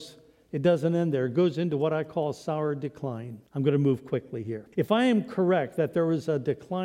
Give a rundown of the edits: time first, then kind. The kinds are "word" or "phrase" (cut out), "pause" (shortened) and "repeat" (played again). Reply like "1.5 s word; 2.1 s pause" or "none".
3.5 s pause; 4.7 s pause